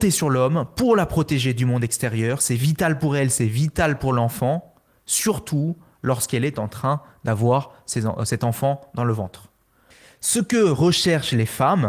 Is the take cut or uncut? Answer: uncut